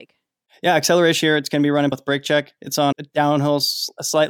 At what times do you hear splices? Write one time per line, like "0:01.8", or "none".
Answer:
0:01.2
0:01.9
0:02.9

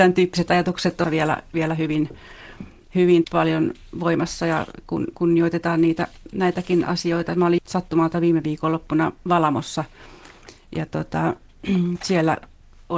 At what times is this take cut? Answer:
0:01.0
0:03.2
0:07.6

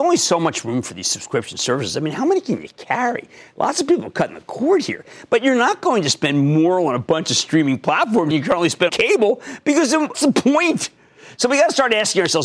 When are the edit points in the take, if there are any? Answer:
0:08.3
0:08.9
0:10.1

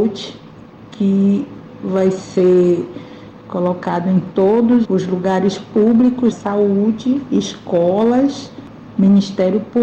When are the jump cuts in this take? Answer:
0:04.8
0:06.3

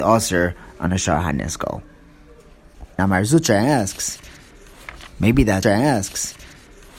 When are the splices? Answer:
0:05.6

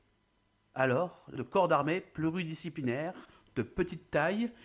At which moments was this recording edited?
0:01.4

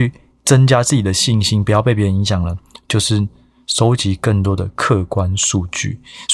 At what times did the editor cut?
none

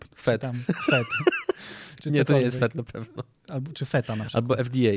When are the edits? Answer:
none

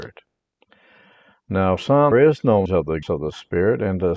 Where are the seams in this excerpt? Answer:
0:01.8
0:02.1
0:02.7
0:03.0

